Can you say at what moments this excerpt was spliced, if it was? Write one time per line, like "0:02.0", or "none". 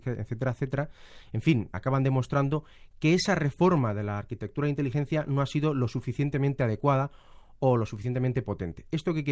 0:01.7